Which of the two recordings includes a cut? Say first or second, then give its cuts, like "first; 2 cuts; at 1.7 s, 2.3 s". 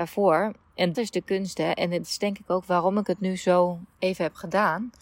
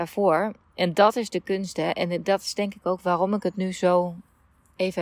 first; 3 cuts; at 0.9 s, 2.0 s, 3.9 s